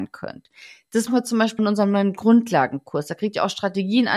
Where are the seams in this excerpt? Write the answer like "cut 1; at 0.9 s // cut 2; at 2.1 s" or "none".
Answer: cut 1; at 1.1 s // cut 2; at 1.6 s